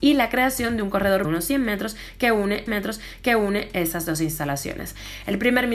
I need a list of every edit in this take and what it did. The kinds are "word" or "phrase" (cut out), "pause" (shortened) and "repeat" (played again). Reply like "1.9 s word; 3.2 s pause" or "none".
1.2 s phrase; 2.7 s repeat